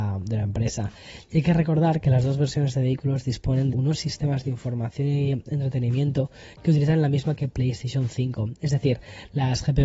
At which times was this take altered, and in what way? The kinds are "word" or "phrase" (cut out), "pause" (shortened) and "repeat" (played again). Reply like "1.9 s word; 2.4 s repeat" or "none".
3.7 s word; 7.3 s word